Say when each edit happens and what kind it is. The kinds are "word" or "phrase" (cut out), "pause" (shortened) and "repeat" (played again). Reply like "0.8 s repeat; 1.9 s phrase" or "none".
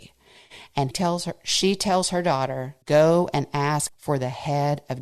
0.9 s word; 2.8 s pause; 3.9 s word